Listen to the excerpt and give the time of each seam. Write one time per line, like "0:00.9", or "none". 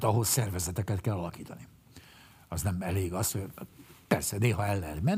none